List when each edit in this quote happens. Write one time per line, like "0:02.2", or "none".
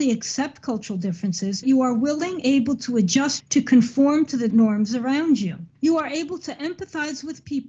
0:01.6
0:02.4
0:03.4
0:04.5
0:05.7